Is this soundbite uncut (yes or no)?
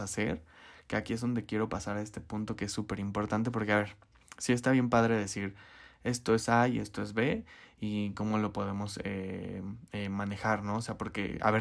yes